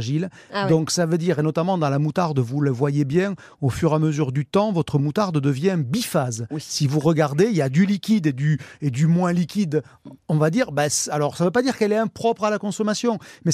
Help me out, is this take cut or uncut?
uncut